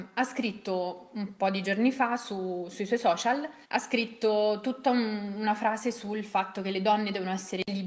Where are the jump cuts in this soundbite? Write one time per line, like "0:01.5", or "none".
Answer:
0:03.6